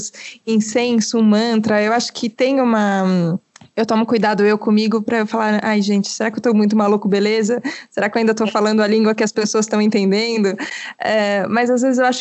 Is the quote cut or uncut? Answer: uncut